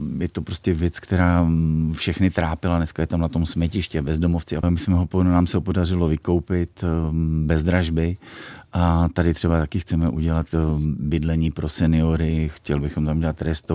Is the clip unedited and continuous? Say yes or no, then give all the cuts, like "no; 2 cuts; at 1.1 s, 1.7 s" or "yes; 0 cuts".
no; 1 cut; at 4.6 s